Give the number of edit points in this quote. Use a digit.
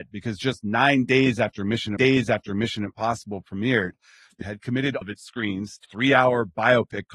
4